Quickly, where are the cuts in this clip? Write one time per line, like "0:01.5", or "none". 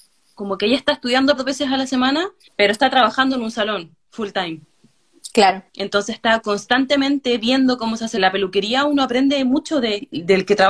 0:01.4
0:02.5
0:05.7
0:08.2